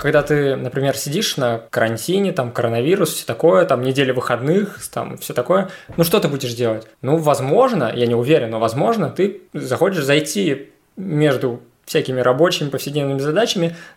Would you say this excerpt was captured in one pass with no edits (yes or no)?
no